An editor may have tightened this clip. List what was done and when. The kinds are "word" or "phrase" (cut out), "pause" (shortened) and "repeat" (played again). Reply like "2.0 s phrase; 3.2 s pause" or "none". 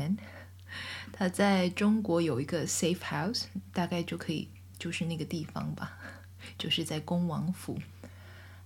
none